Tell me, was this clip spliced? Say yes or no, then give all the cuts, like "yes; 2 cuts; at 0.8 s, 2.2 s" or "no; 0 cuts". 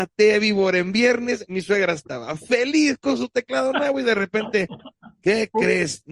no; 0 cuts